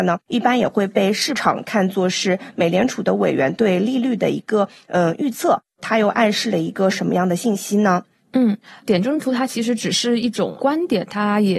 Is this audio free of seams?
yes; 0 cuts

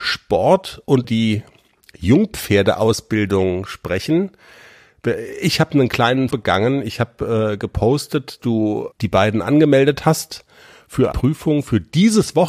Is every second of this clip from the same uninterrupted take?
no; 5 cuts; at 1.0 s, 6.3 s, 8.4 s, 8.9 s, 11.1 s

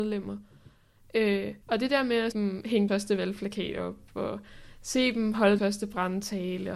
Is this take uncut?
no; 4 cuts; at 1.6 s, 2.3 s, 2.9 s, 5.6 s

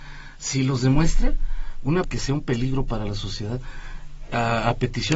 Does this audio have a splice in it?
yes; 1 cut; at 2.0 s

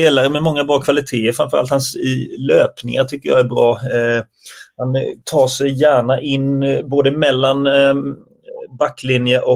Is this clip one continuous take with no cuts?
no; 1 cut; at 5.2 s

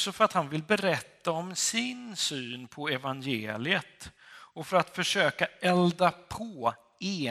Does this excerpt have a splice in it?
no; 0 cuts

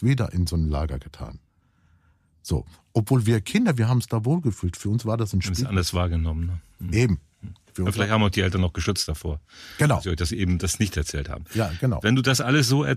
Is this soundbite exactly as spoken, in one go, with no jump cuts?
yes; 0 cuts

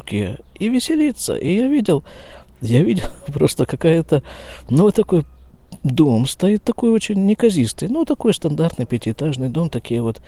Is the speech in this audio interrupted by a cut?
no; 0 cuts

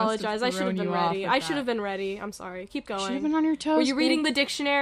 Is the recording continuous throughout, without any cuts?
yes; 0 cuts

